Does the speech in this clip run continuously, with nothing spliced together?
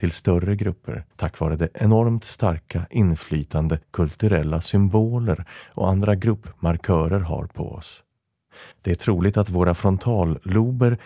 no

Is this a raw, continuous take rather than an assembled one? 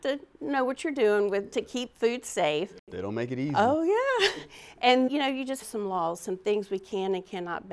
no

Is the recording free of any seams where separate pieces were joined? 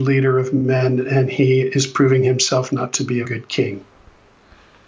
no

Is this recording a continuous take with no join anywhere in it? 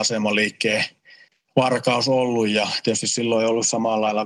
no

